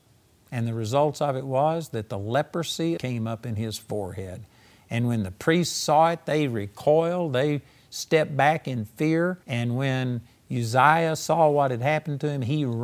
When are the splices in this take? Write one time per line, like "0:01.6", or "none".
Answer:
0:03.0
0:09.4